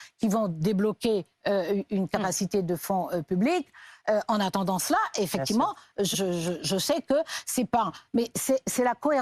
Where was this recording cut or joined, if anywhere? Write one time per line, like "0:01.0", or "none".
0:06.1